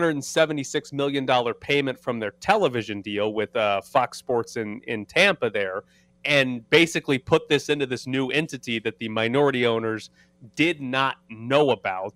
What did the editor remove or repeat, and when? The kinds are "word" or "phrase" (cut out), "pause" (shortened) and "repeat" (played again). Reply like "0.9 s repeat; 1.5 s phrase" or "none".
none

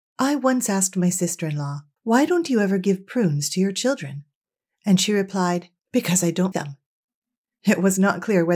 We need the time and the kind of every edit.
2.0 s pause; 5.8 s pause; 6.5 s word

